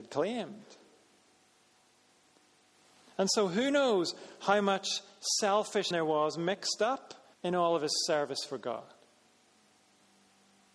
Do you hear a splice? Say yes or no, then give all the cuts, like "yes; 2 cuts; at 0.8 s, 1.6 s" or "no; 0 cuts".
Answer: yes; 2 cuts; at 5.9 s, 7.3 s